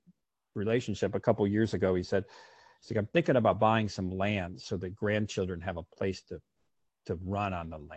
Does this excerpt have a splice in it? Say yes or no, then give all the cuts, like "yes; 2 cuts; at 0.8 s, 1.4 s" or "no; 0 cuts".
no; 0 cuts